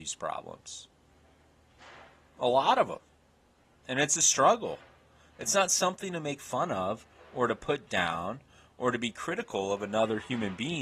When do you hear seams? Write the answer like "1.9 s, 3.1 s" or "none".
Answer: none